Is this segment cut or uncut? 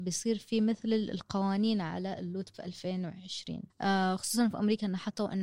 cut